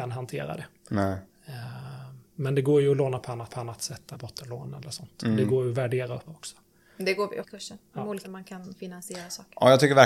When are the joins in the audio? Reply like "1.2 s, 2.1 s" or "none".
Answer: 2.2 s, 3.5 s, 4.1 s, 6.3 s, 7.4 s, 8.2 s

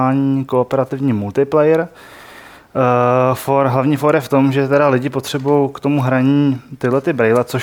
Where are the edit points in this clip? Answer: none

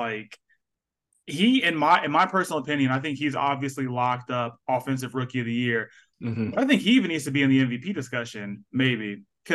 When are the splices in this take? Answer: none

